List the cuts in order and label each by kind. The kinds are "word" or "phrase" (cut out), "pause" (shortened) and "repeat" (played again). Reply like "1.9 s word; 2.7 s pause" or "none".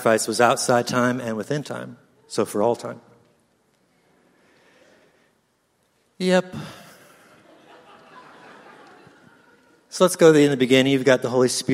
none